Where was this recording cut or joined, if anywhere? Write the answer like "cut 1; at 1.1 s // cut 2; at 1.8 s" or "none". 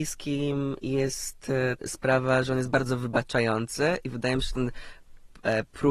cut 1; at 1.8 s